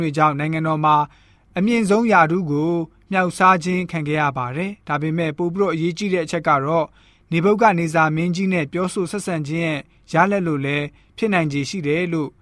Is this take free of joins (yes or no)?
yes